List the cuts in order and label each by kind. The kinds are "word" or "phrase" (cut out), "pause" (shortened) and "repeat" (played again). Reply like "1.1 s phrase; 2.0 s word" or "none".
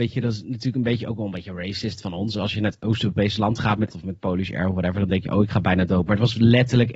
3.9 s word